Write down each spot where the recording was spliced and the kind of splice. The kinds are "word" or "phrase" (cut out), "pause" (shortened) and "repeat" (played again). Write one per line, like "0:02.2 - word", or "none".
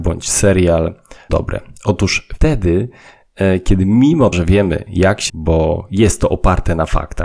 0:01.3 - word
0:02.4 - word
0:04.3 - word
0:05.3 - word